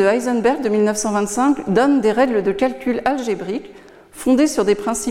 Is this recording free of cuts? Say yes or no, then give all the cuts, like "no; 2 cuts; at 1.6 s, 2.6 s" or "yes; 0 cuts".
yes; 0 cuts